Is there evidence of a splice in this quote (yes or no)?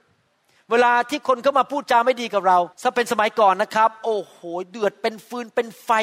yes